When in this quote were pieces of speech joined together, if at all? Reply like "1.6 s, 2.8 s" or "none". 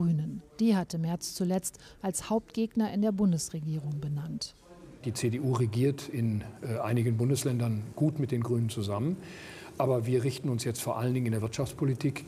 none